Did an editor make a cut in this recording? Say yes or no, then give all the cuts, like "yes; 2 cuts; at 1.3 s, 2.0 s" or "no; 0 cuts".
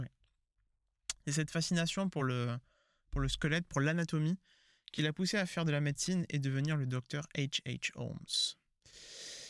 no; 0 cuts